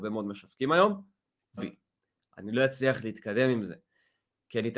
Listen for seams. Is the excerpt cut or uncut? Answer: cut